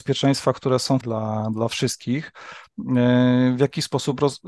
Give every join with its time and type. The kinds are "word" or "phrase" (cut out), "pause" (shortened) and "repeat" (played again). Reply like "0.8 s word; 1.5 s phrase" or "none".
1.0 s word